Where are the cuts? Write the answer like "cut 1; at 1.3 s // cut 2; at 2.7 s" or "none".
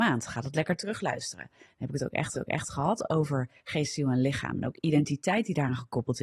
cut 1; at 2.3 s